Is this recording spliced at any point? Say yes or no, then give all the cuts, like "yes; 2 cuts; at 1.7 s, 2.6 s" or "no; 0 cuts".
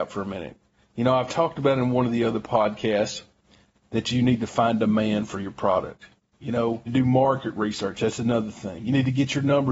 yes; 1 cut; at 6.9 s